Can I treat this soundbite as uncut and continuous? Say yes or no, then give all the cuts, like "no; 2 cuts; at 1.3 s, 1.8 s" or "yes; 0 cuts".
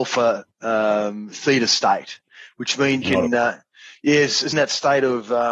no; 2 cuts; at 3.0 s, 4.5 s